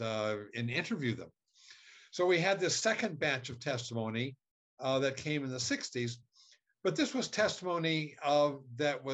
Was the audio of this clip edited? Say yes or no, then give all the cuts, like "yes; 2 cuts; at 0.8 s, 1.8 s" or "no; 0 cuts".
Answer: no; 0 cuts